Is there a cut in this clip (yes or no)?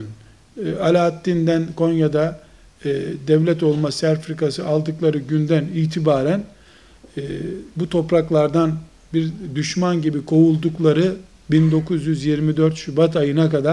no